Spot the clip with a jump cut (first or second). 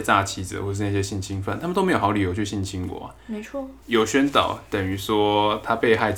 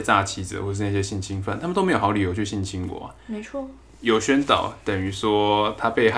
first